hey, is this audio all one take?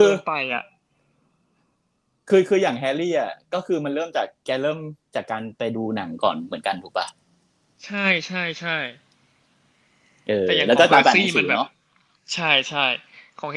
yes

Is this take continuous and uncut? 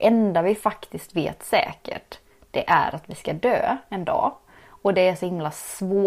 yes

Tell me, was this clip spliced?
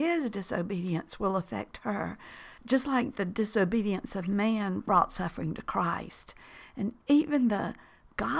yes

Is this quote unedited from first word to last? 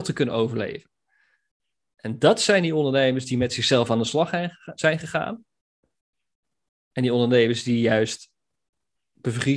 yes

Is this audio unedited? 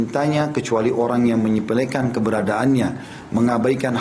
yes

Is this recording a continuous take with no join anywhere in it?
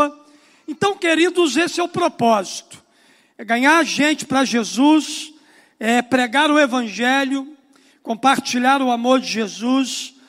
yes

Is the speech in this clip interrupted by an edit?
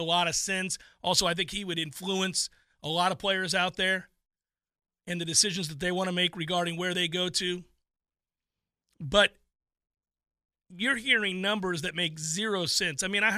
no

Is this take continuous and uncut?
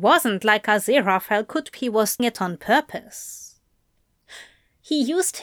no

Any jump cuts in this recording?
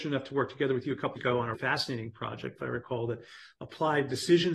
yes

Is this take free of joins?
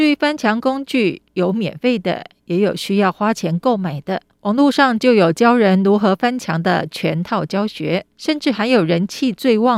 no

